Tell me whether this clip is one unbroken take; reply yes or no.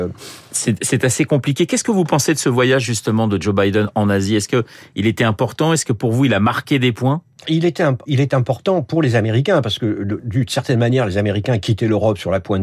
no